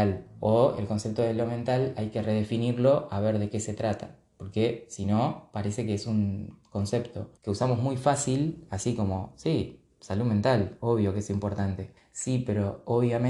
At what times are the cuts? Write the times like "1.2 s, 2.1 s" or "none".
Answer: 7.4 s, 12.0 s